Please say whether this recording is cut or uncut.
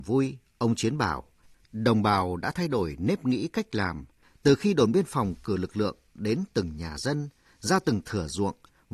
uncut